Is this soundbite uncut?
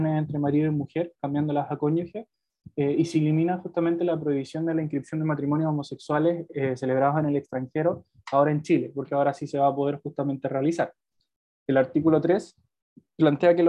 yes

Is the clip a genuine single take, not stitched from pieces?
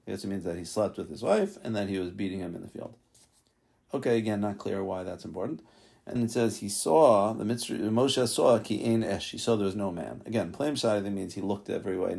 no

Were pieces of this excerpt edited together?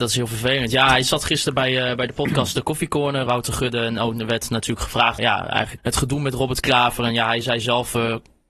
yes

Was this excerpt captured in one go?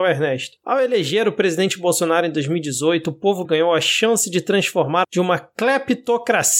no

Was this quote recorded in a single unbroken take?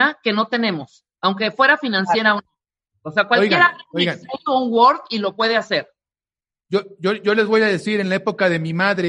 yes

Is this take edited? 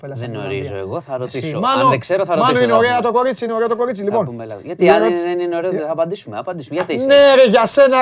no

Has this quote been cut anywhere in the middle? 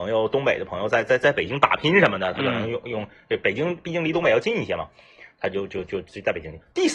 no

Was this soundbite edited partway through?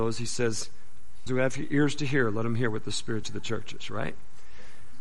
yes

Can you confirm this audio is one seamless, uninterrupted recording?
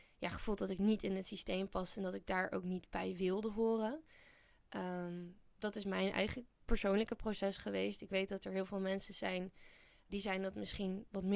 no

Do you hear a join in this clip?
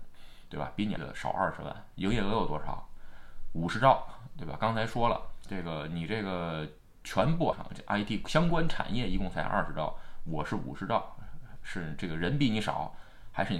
yes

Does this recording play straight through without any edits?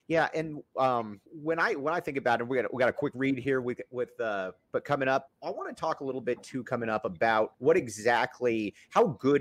no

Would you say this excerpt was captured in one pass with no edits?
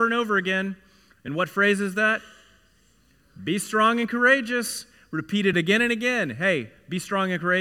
yes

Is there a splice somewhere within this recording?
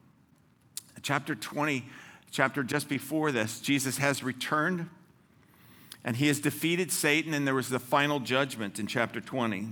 no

